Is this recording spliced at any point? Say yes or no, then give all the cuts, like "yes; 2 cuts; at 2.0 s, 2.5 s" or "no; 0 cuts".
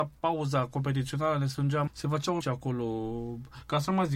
yes; 2 cuts; at 1.9 s, 2.4 s